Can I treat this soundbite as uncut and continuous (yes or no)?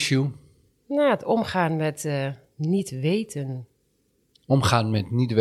yes